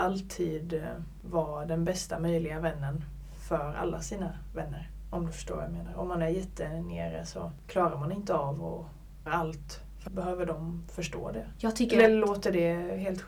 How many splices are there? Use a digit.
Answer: 2